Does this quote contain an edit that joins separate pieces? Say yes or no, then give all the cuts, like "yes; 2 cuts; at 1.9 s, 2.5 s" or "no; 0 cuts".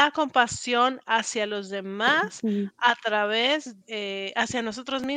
yes; 1 cut; at 3.8 s